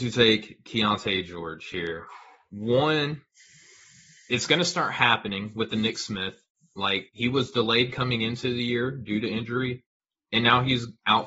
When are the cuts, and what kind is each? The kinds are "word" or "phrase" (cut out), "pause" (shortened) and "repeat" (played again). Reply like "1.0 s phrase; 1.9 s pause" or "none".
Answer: 7.1 s word